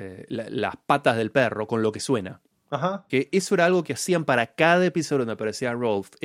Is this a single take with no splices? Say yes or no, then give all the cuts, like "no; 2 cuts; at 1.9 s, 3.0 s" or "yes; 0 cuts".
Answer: yes; 0 cuts